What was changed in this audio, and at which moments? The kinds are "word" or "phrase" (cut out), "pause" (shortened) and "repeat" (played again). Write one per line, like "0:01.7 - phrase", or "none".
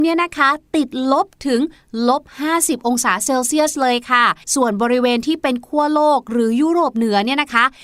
0:04.4 - pause